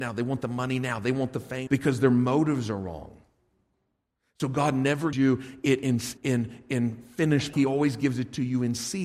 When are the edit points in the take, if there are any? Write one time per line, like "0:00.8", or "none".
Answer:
0:01.7
0:05.1
0:06.2
0:07.5